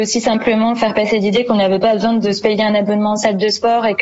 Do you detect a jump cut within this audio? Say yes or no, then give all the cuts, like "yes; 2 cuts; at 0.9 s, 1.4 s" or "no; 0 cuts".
no; 0 cuts